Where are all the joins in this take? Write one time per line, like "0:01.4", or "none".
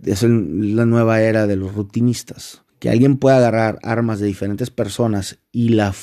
0:02.7